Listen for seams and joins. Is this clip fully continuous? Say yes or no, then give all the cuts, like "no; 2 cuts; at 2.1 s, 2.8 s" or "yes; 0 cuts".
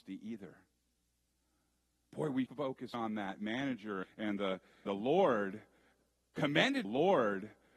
no; 5 cuts; at 2.5 s, 2.9 s, 4.0 s, 4.9 s, 6.8 s